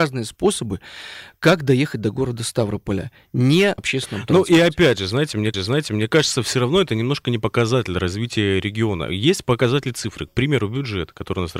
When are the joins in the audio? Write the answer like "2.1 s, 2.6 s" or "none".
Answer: 3.8 s, 5.5 s